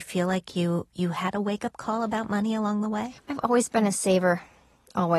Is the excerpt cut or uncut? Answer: cut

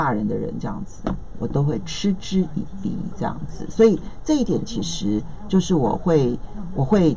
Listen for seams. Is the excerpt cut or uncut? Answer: cut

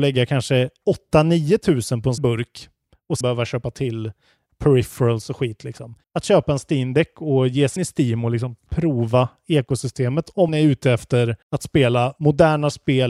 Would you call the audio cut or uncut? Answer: cut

